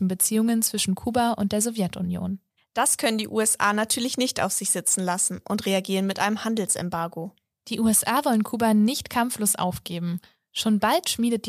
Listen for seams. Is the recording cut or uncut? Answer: uncut